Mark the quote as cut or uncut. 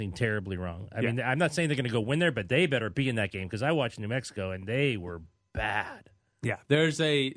uncut